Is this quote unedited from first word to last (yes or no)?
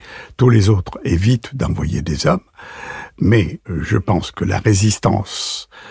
yes